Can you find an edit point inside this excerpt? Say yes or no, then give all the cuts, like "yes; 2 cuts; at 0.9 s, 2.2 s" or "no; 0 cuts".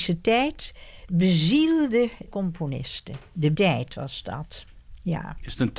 yes; 2 cuts; at 2.3 s, 3.5 s